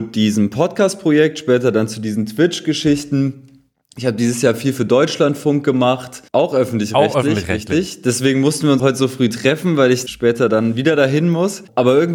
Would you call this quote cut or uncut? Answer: cut